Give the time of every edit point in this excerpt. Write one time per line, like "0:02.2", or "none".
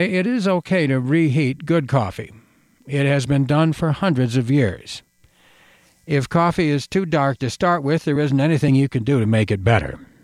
none